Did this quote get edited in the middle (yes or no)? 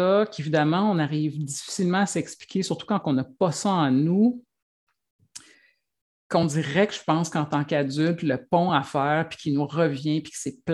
no